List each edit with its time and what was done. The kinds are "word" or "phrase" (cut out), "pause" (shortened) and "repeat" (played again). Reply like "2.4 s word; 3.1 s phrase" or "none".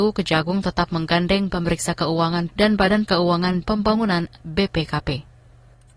1.5 s word; 2.5 s word; 3.1 s word; 3.6 s word